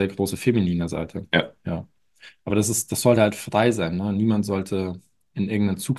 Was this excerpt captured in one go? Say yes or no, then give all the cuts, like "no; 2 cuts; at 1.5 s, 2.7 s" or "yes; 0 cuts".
yes; 0 cuts